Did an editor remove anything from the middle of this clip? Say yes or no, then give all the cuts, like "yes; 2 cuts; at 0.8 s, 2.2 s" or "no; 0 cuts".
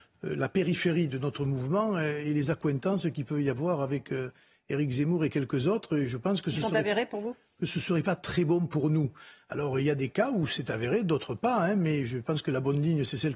no; 0 cuts